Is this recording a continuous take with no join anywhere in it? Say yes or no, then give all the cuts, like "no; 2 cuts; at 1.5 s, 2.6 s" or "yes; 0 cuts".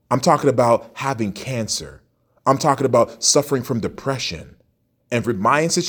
yes; 0 cuts